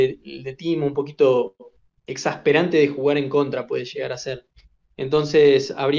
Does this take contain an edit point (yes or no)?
no